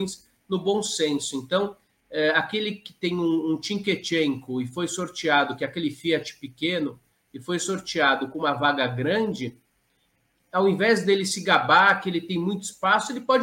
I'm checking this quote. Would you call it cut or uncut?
uncut